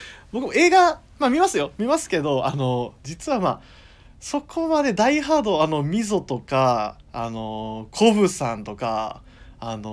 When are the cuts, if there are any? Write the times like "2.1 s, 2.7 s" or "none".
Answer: none